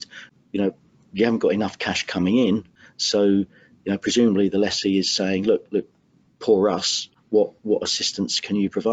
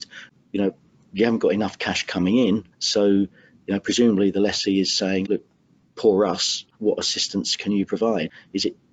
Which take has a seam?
second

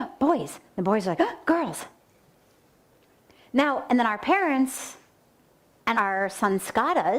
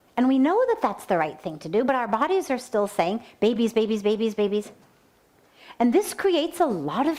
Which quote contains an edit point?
first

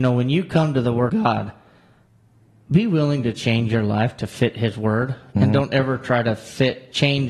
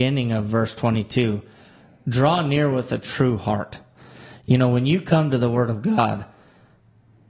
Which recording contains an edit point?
first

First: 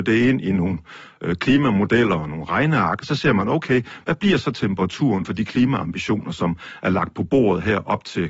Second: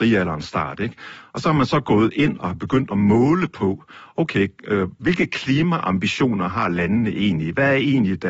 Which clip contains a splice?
first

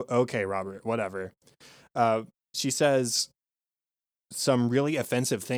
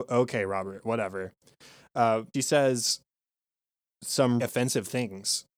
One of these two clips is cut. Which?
second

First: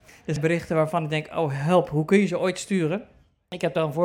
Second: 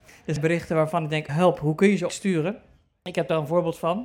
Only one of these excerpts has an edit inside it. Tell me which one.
second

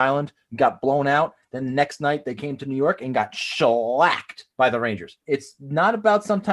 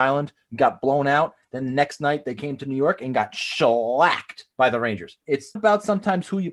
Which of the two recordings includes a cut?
second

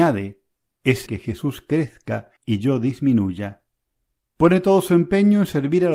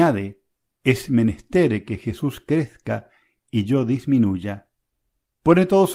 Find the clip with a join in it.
first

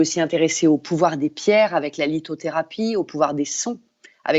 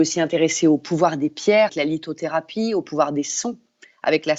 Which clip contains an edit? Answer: second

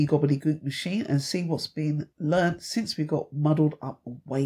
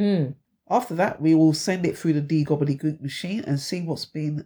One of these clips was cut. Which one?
first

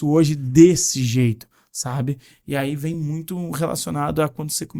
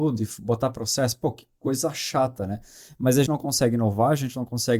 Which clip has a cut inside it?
second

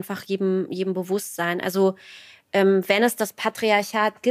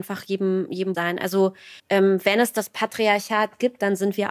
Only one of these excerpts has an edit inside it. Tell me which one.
second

